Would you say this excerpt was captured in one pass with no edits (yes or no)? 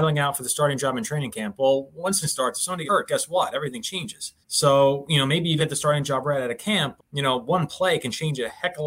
no